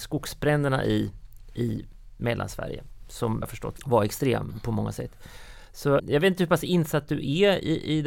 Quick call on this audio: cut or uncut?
cut